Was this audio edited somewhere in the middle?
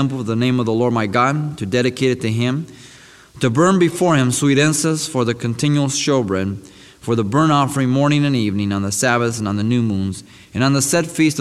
no; 0 cuts

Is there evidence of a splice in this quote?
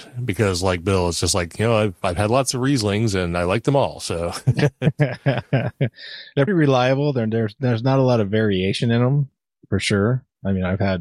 yes; 1 cut; at 6.5 s

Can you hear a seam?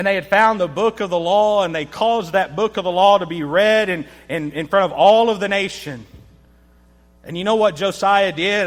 no; 0 cuts

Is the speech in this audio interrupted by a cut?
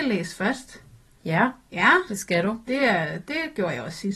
no; 0 cuts

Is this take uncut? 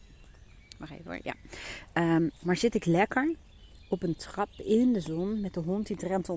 yes; 0 cuts

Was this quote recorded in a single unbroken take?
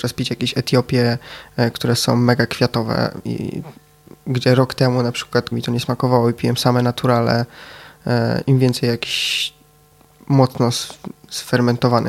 no; 1 cut; at 5.5 s

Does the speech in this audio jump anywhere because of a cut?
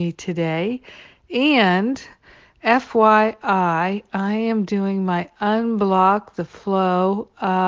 no; 0 cuts

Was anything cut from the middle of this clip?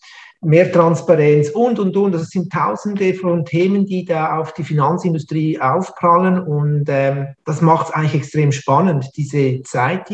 no; 0 cuts

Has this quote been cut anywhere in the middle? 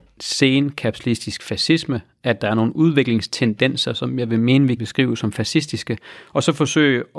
yes; 1 cut; at 4.8 s

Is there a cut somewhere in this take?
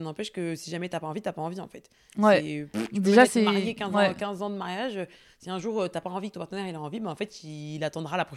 no; 0 cuts

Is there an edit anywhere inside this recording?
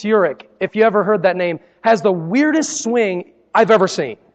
no; 0 cuts

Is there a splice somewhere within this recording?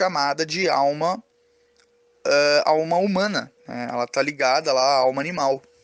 yes; 1 cut; at 3.6 s

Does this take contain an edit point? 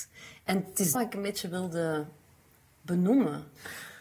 yes; 1 cut; at 0.9 s

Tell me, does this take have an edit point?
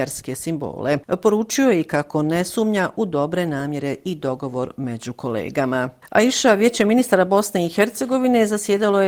no; 0 cuts

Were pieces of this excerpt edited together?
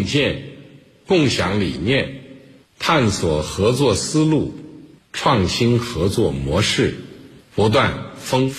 no; 0 cuts

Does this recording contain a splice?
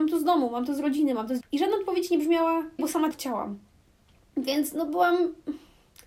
yes; 3 cuts; at 1.4 s, 2.8 s, 3.1 s

